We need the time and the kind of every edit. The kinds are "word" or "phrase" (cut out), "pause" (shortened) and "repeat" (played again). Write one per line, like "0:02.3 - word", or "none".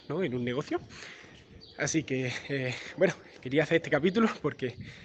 none